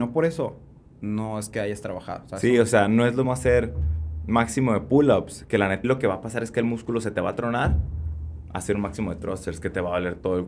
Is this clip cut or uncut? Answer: cut